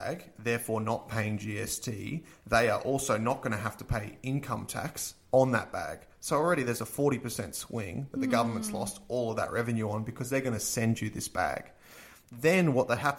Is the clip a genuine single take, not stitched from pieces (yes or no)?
yes